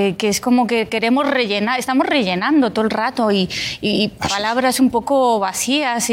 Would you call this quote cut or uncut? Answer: uncut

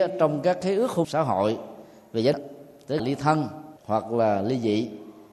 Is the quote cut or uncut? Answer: cut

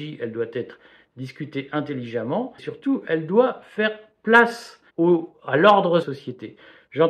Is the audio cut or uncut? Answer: cut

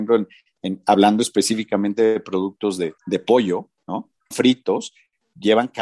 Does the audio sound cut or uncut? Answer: cut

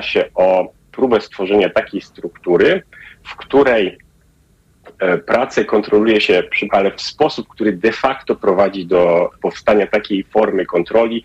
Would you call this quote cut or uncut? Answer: cut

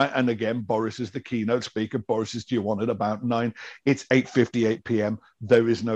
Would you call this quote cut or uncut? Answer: uncut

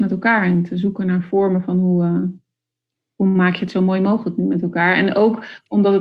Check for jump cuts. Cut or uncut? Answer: uncut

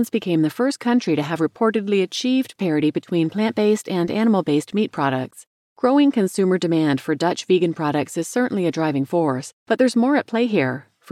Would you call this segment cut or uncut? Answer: cut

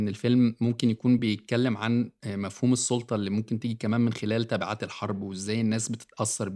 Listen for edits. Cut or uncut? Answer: uncut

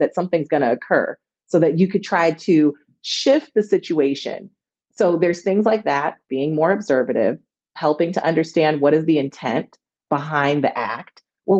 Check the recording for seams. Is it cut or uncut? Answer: uncut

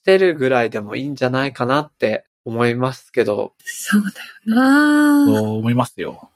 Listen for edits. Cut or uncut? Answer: cut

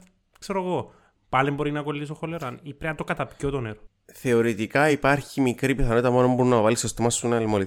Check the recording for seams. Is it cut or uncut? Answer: uncut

